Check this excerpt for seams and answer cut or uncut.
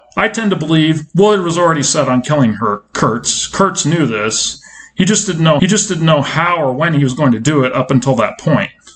cut